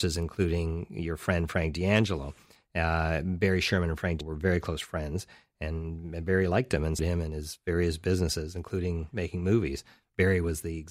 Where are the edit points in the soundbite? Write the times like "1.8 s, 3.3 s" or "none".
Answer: 4.2 s, 7.0 s

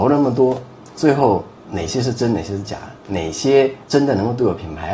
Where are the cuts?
1.6 s, 3.8 s

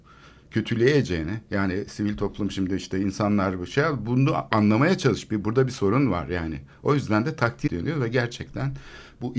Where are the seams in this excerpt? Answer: 7.7 s

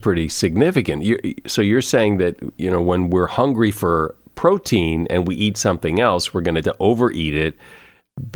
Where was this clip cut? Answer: 6.6 s

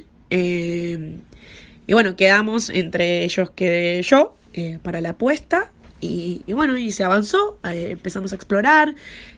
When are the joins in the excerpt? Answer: 4.4 s

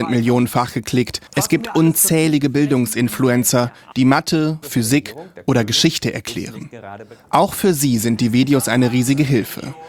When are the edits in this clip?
1.3 s, 3.9 s, 4.6 s

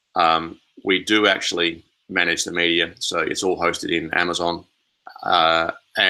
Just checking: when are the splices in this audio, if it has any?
none

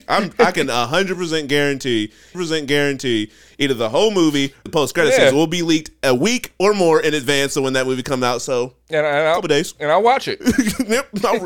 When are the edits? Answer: 2.3 s, 4.7 s, 8.8 s

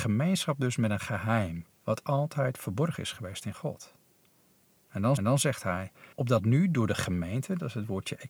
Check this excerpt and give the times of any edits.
1.7 s, 5.2 s, 6.1 s

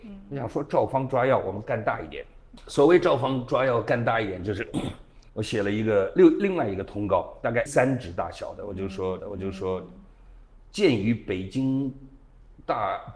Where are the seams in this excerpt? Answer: 5.3 s, 7.7 s, 9.2 s

